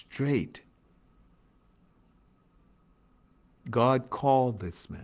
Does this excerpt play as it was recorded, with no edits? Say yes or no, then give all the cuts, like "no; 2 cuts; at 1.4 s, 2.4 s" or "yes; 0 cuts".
yes; 0 cuts